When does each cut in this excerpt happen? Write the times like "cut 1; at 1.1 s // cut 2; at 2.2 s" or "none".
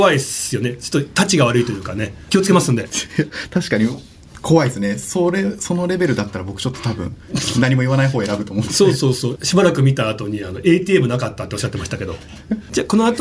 cut 1; at 2.3 s // cut 2; at 9.4 s

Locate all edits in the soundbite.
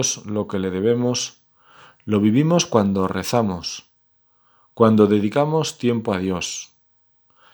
none

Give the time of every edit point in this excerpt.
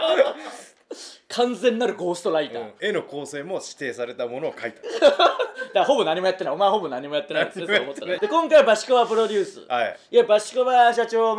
cut 1; at 8.2 s

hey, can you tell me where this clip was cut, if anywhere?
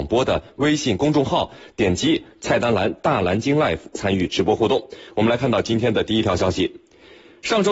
none

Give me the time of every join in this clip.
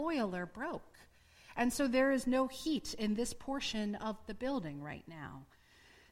none

